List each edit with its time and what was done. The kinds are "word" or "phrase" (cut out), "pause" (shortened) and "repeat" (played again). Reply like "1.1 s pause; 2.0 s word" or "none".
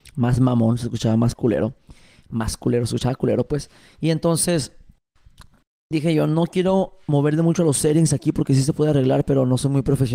none